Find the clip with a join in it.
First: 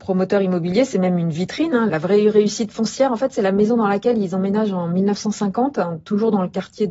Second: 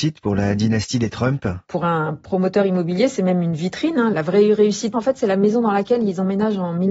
second; 1 cut; at 4.9 s

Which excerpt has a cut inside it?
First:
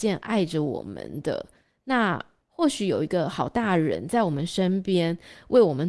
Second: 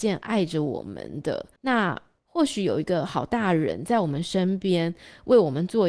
second; 1 cut; at 1.6 s

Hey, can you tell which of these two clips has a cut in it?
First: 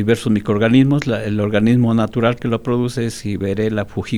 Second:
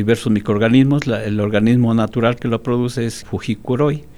second; 1 cut; at 3.2 s

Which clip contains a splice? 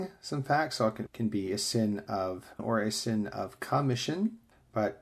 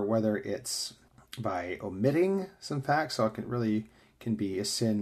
first; 2 cuts; at 1.1 s, 2.6 s

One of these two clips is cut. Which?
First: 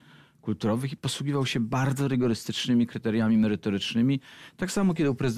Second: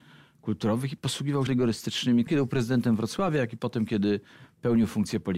second; 2 cuts; at 1.5 s, 2.3 s

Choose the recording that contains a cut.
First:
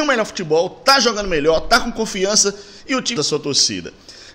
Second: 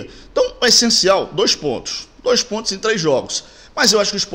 first; 1 cut; at 3.2 s

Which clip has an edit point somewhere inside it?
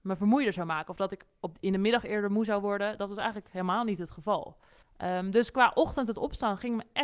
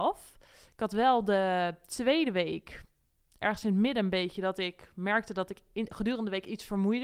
first; 1 cut; at 4.8 s

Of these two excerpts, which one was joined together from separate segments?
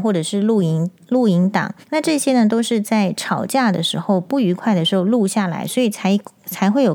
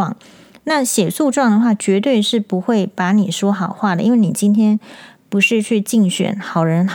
first; 1 cut; at 1.8 s

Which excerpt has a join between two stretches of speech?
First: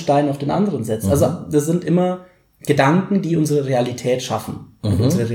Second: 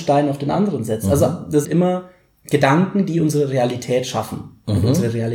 second; 1 cut; at 1.6 s

